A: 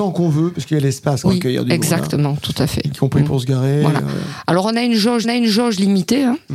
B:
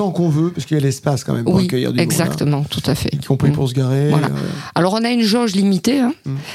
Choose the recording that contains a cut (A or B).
A